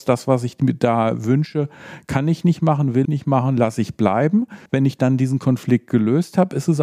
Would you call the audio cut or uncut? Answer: cut